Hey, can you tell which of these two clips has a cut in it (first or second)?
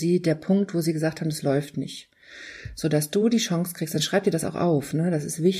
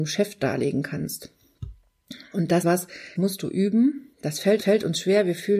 second